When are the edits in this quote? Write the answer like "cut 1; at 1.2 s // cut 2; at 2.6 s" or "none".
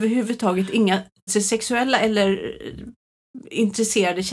cut 1; at 1.3 s